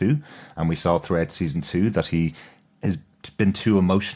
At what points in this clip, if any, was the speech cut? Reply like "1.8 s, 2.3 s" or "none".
none